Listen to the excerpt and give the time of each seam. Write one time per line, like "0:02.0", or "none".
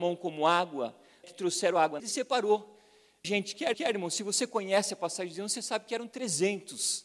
0:01.2
0:02.0
0:03.2
0:03.7